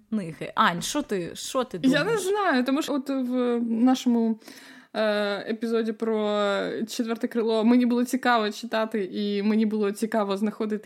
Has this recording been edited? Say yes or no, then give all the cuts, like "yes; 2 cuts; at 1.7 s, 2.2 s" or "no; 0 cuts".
yes; 1 cut; at 2.9 s